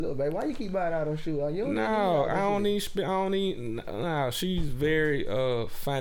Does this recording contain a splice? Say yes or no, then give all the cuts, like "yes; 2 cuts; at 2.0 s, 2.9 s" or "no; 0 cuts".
no; 0 cuts